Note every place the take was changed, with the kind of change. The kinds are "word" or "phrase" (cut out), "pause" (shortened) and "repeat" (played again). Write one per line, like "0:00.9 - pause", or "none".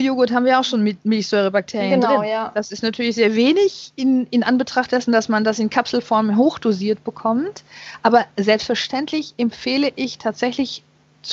none